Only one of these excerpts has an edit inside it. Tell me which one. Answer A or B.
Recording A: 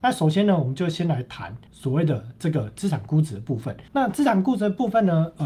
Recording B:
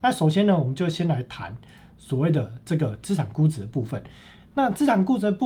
A